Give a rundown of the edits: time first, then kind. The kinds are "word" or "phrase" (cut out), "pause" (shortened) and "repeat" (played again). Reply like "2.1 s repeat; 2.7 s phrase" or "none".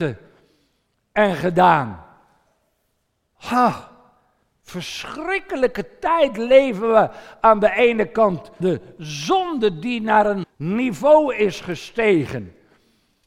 8.6 s word; 10.4 s word